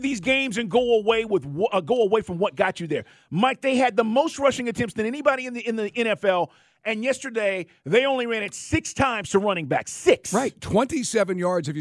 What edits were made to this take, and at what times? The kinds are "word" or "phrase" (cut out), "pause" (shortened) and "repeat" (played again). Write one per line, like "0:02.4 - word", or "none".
none